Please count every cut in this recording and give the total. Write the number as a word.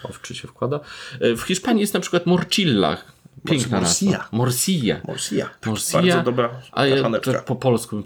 zero